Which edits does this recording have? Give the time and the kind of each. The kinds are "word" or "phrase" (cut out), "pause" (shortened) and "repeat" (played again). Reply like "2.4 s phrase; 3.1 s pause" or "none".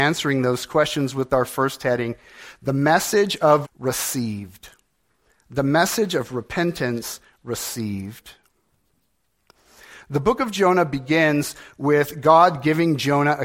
3.6 s word